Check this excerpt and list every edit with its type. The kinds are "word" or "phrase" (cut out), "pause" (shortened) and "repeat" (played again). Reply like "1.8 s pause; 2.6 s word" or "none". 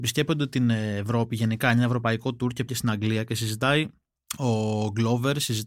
2.7 s word

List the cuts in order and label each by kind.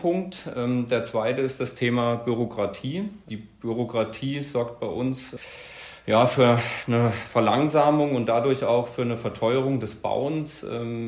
3.2 s pause

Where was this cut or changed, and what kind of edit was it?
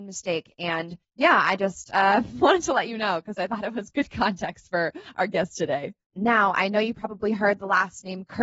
1.0 s pause

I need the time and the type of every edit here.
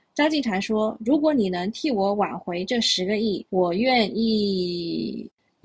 3.5 s pause

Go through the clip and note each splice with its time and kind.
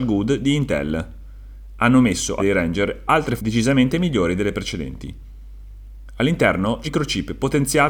2.4 s word; 3.4 s word; 6.8 s word

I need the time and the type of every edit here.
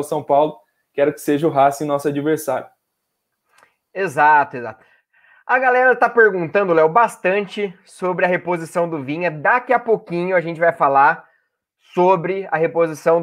none

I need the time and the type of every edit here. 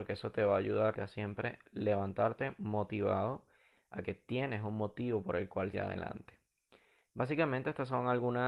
0.9 s word; 5.7 s word

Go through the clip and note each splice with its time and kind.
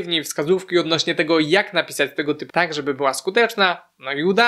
2.5 s word

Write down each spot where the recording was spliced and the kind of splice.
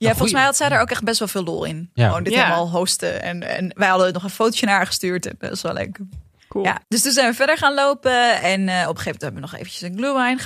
6.4 s pause; 6.8 s pause

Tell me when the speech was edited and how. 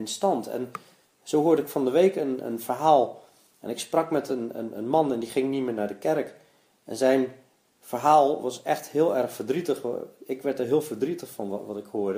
none

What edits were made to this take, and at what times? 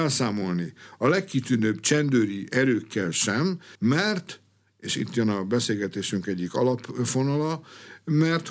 3.7 s pause

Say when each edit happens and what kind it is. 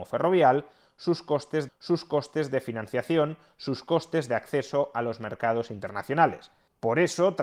1.7 s repeat

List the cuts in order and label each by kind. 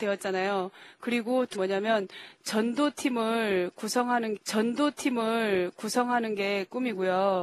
1.5 s word; 4.4 s repeat

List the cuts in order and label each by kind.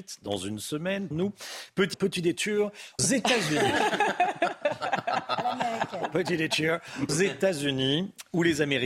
1.1 s word; 1.9 s word; 3.0 s word; 7.1 s word

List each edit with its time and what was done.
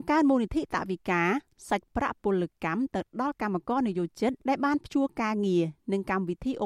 4.4 s pause

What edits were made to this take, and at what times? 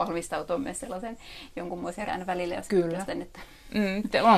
2.1 s word

